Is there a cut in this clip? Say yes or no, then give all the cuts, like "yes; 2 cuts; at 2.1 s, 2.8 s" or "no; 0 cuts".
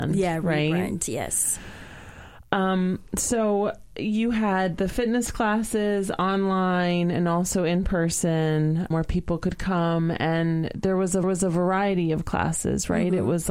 yes; 2 cuts; at 8.9 s, 11.2 s